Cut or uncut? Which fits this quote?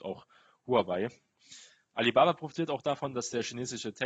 uncut